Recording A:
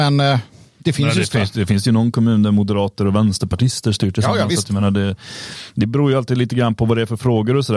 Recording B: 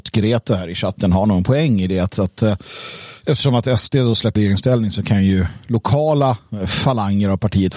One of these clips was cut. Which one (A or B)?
B